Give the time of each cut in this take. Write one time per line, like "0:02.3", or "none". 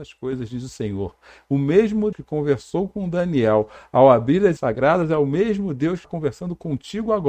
0:02.1
0:04.6
0:06.0